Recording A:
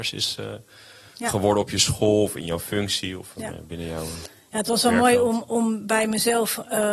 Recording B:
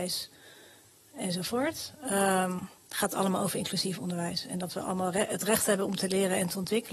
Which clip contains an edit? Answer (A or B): A